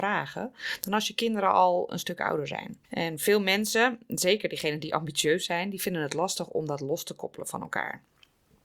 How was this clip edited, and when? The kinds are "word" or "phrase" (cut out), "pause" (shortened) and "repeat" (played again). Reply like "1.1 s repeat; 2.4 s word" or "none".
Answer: 2.8 s pause